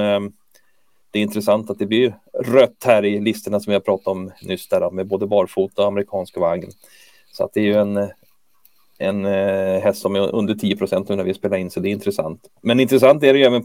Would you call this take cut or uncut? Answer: uncut